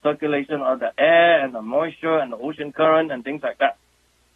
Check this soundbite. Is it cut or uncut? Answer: uncut